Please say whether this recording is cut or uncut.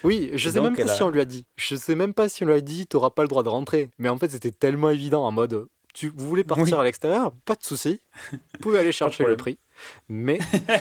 cut